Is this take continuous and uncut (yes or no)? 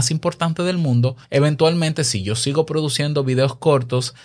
no